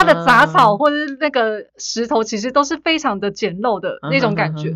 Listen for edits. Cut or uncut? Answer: cut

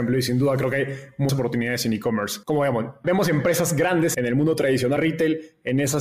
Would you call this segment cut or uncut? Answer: cut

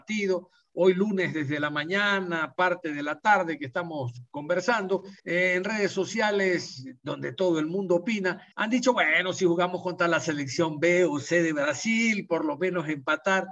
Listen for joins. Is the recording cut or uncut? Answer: cut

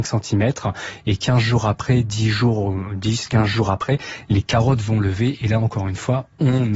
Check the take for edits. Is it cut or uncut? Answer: uncut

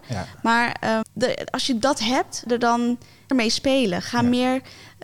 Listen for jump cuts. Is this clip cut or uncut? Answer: cut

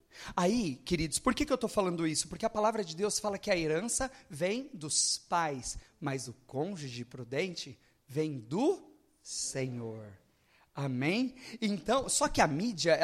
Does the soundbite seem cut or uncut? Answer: uncut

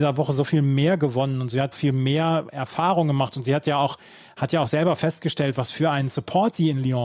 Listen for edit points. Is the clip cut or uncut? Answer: cut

